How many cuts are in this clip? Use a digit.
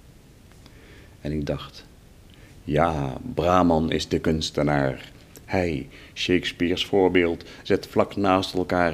0